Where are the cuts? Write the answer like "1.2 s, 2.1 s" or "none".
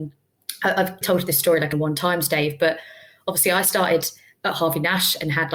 1.0 s, 1.7 s, 4.4 s